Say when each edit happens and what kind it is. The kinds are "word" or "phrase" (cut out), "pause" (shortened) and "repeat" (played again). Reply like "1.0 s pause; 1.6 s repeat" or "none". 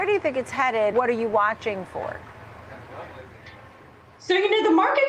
0.9 s word